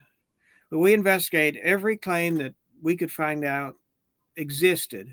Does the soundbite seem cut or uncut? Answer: uncut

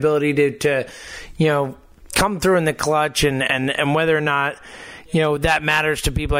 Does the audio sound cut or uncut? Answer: uncut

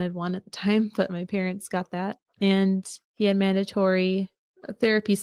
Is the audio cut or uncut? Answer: uncut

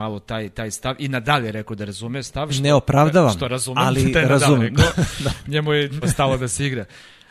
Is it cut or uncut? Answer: cut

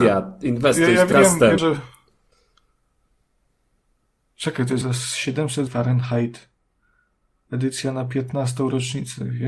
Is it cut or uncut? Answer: cut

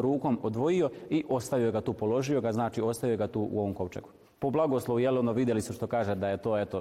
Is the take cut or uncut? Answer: cut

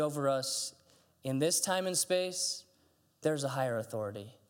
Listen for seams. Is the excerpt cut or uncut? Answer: cut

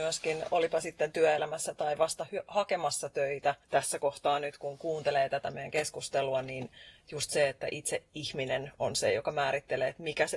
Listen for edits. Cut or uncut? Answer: cut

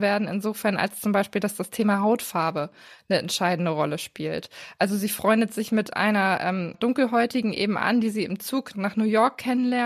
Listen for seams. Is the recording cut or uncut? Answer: cut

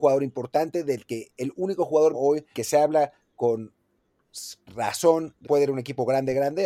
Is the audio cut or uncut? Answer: cut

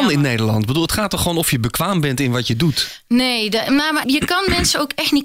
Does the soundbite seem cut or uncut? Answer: cut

